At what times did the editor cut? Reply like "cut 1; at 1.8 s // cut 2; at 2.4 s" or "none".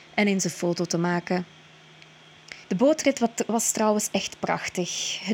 cut 1; at 2.6 s